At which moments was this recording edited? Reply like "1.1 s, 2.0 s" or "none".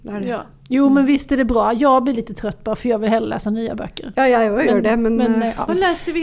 none